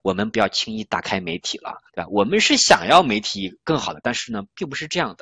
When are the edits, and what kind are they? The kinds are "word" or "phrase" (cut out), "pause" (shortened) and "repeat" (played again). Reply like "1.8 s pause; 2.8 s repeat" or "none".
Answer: 1.9 s pause